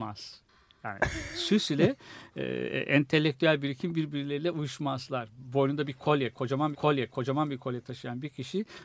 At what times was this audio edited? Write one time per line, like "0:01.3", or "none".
0:06.7